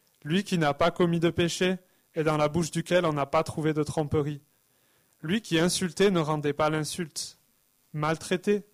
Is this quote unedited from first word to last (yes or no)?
yes